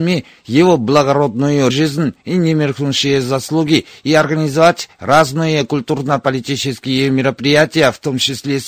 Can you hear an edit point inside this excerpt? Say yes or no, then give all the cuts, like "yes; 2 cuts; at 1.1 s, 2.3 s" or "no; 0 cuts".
yes; 1 cut; at 1.7 s